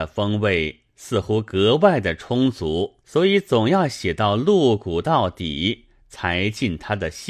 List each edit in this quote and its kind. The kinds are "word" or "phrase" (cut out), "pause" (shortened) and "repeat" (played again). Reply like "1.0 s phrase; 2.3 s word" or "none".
3.0 s pause